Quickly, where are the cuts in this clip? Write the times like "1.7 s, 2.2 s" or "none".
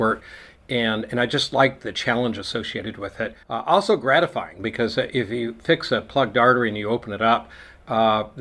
3.4 s